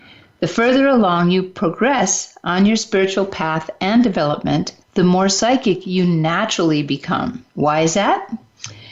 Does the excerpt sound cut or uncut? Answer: cut